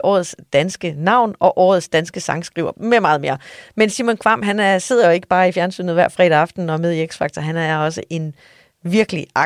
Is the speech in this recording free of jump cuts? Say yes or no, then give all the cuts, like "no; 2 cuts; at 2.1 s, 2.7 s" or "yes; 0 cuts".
yes; 0 cuts